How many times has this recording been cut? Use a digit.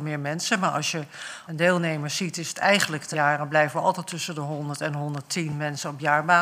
2